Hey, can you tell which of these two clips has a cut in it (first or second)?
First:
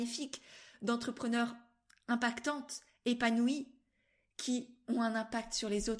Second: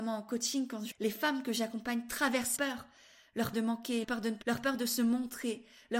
second